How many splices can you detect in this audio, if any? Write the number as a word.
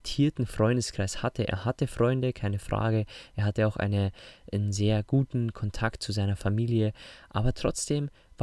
zero